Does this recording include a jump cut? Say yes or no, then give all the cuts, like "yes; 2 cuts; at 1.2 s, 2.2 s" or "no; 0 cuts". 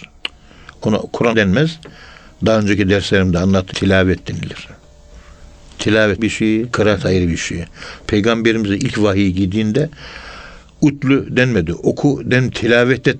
yes; 4 cuts; at 1.3 s, 3.7 s, 6.2 s, 6.7 s